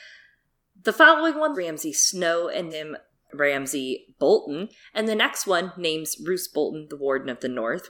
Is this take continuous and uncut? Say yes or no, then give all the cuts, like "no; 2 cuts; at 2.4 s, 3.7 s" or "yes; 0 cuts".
no; 3 cuts; at 1.5 s, 2.7 s, 3.2 s